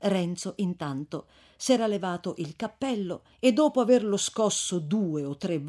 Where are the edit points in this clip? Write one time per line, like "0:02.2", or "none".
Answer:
0:03.3